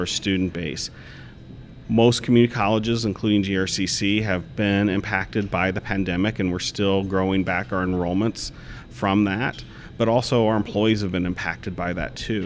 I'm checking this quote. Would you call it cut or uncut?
uncut